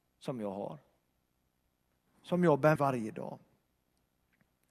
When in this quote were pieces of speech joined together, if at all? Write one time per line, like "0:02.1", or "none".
0:02.8